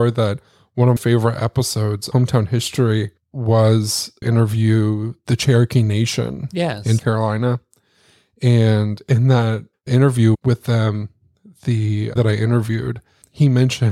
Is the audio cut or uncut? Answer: cut